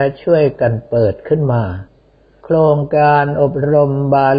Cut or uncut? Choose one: uncut